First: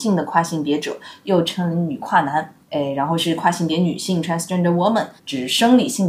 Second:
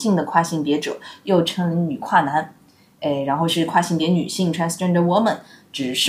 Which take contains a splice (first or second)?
first